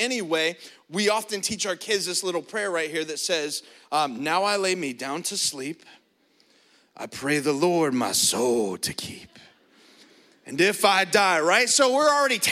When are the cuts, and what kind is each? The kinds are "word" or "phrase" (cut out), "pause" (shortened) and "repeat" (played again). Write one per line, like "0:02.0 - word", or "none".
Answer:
none